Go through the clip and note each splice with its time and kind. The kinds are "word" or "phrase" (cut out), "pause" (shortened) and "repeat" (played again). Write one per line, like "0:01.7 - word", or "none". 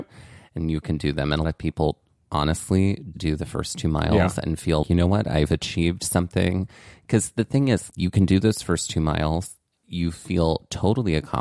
0:01.4 - word
0:03.1 - word
0:04.8 - word
0:07.9 - word